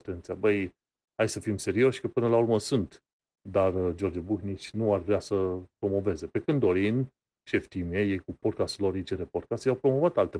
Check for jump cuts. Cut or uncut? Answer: uncut